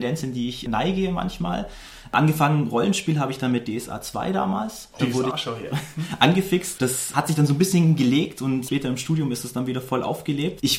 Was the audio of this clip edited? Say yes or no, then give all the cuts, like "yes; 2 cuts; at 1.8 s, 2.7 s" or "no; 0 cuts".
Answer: yes; 2 cuts; at 5.0 s, 5.3 s